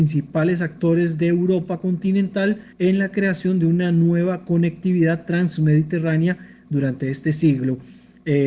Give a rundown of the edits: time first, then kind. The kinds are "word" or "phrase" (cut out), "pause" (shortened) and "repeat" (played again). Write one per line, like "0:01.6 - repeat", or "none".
0:02.7 - pause